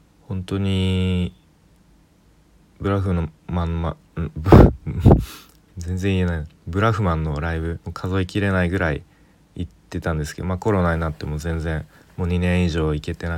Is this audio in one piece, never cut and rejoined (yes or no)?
no